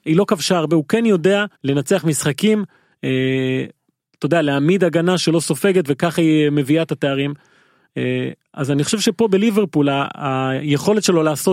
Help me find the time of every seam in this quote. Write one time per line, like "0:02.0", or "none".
0:01.5